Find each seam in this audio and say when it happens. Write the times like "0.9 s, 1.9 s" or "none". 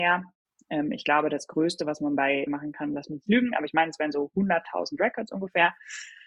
2.5 s